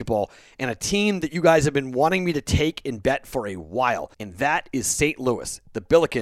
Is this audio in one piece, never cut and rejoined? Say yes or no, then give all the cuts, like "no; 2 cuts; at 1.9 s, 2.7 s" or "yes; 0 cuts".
no; 1 cut; at 4.1 s